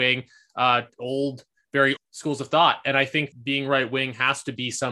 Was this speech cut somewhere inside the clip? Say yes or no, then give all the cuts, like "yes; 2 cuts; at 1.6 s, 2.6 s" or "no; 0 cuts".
yes; 2 cuts; at 2.0 s, 3.3 s